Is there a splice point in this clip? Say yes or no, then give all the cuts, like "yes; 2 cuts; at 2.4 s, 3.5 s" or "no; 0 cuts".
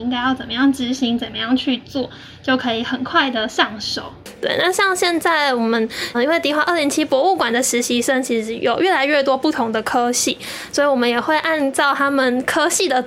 yes; 1 cut; at 6.1 s